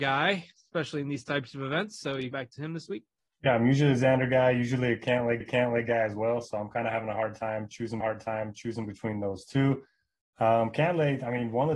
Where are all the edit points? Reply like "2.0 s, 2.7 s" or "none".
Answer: 2.3 s, 3.2 s, 5.4 s, 8.0 s